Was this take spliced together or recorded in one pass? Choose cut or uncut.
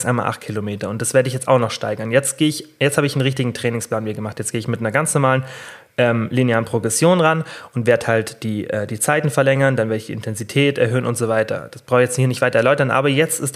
uncut